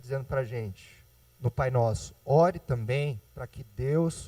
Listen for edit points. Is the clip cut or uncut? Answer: cut